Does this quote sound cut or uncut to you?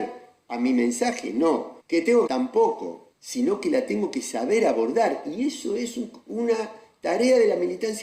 cut